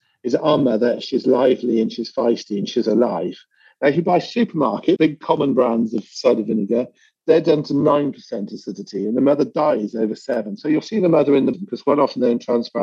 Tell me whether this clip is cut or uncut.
cut